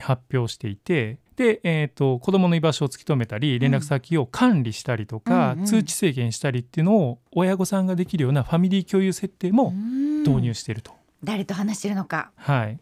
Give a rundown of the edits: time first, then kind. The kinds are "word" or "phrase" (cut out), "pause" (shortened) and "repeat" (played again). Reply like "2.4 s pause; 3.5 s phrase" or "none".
1.3 s pause